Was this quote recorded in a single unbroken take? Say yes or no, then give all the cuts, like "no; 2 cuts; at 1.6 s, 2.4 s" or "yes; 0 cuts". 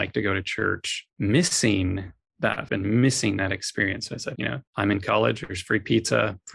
no; 4 cuts; at 1.1 s, 2.7 s, 4.4 s, 4.7 s